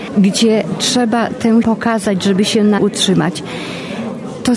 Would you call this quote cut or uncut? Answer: cut